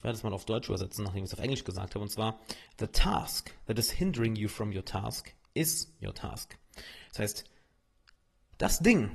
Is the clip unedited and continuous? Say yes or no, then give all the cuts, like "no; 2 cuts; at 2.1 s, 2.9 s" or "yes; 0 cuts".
yes; 0 cuts